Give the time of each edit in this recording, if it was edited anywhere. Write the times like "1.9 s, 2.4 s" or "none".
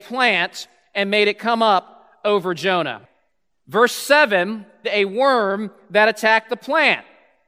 4.8 s